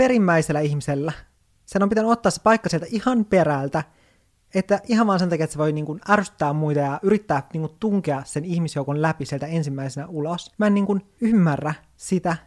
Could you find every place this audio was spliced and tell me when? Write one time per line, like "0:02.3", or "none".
none